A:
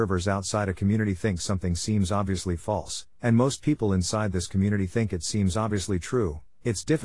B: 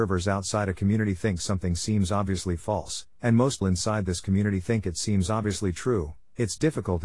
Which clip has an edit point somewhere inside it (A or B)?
B